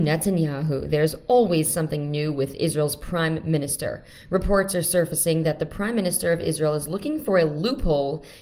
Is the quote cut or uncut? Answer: uncut